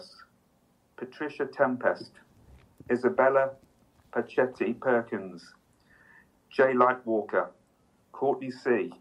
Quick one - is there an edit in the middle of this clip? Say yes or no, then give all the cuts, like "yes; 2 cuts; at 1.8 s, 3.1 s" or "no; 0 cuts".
no; 0 cuts